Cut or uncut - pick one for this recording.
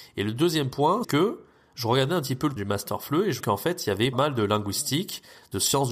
cut